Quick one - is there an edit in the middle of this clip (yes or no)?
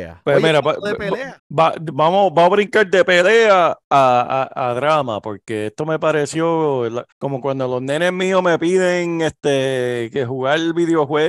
yes